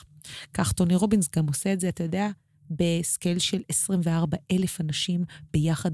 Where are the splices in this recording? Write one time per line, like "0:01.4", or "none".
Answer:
none